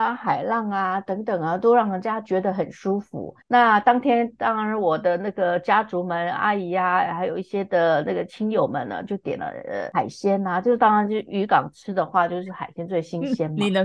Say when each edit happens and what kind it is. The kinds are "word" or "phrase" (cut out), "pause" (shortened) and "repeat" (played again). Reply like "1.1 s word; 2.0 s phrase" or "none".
3.4 s pause